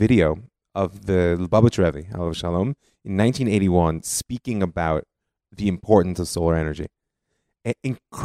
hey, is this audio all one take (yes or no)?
yes